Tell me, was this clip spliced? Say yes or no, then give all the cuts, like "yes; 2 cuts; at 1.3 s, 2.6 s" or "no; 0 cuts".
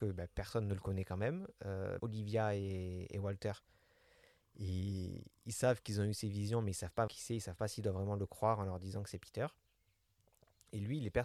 yes; 2 cuts; at 2.0 s, 7.1 s